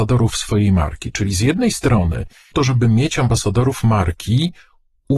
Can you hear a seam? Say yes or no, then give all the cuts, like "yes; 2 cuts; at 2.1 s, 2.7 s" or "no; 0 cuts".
yes; 1 cut; at 2.5 s